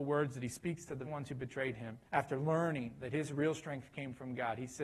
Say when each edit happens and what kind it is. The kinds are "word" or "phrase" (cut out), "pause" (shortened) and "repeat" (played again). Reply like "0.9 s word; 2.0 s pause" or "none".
1.0 s word; 2.1 s pause